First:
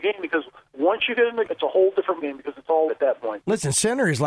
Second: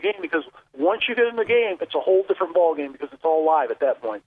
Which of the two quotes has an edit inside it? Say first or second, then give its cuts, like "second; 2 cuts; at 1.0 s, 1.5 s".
first; 3 cuts; at 1.5 s, 2.2 s, 2.9 s